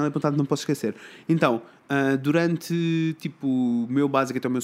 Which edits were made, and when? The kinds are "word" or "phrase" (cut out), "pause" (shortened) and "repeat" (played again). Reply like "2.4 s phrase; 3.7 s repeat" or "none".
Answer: none